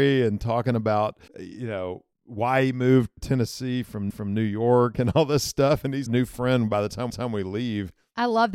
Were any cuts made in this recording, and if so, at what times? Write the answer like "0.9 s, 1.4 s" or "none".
1.3 s, 2.1 s, 3.2 s, 4.1 s, 6.1 s, 7.1 s